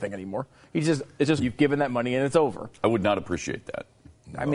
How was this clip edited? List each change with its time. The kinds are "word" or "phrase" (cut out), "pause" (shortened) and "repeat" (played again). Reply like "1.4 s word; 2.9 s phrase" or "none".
1.4 s phrase